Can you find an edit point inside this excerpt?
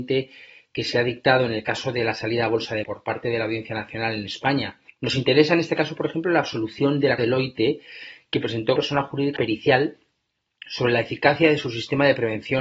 yes; 5 cuts; at 2.8 s, 4.9 s, 7.2 s, 8.8 s, 9.4 s

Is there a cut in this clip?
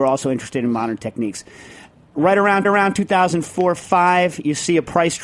yes; 1 cut; at 2.6 s

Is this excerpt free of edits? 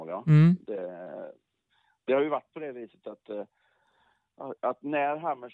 yes; 0 cuts

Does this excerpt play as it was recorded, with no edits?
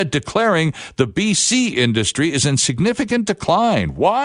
yes; 0 cuts

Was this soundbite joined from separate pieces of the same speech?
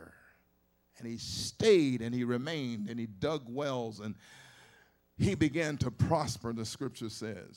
no; 0 cuts

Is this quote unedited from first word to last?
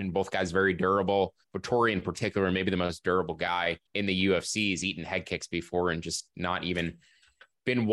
no; 2 cuts; at 1.4 s, 3.9 s

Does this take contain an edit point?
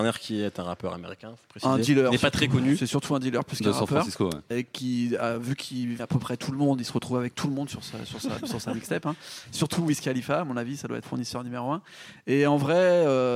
yes; 3 cuts; at 4.5 s, 6.0 s, 11.0 s

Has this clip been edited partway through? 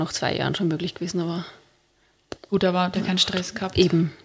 yes; 2 cuts; at 2.4 s, 2.9 s

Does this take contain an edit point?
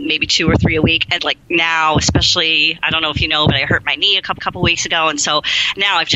yes; 2 cuts; at 1.2 s, 4.4 s

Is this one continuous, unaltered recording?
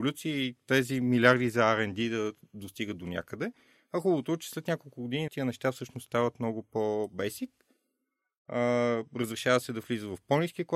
no; 1 cut; at 5.3 s

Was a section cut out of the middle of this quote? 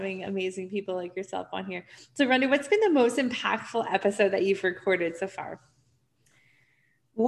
no; 0 cuts

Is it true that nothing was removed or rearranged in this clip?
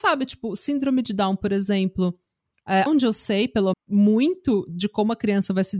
no; 2 cuts; at 2.9 s, 3.7 s

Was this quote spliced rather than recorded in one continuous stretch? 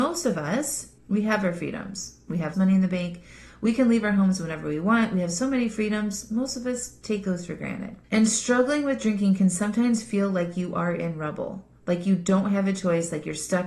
yes; 3 cuts; at 1.0 s, 2.5 s, 8.0 s

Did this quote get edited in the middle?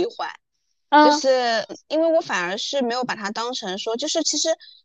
yes; 1 cut; at 1.7 s

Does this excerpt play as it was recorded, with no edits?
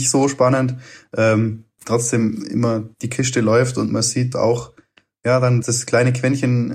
no; 4 cuts; at 2.9 s, 3.9 s, 4.3 s, 5.6 s

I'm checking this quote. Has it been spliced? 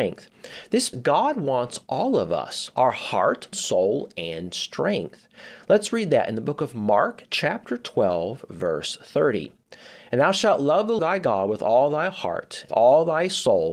yes; 4 cuts; at 0.9 s, 3.5 s, 11.0 s, 12.7 s

